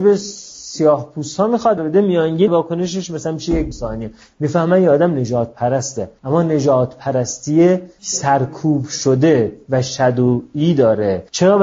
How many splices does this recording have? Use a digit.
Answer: 3